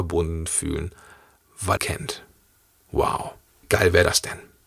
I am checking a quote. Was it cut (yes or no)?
yes